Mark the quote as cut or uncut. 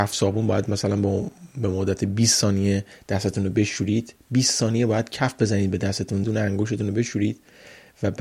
cut